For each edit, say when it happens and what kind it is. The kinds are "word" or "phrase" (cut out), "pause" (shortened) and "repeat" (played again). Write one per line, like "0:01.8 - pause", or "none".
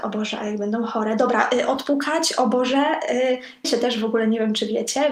0:03.6 - phrase